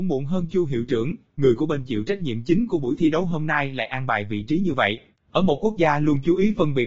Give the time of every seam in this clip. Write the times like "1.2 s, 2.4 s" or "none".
none